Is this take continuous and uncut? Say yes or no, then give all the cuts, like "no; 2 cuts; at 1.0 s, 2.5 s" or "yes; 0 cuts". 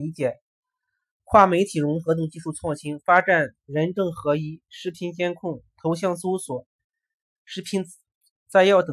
yes; 0 cuts